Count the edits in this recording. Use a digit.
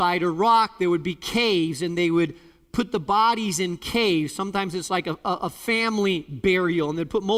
0